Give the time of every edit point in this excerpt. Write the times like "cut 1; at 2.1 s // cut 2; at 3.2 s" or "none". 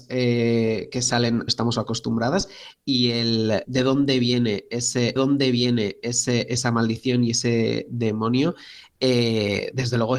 cut 1; at 1.5 s // cut 2; at 3.6 s // cut 3; at 5.2 s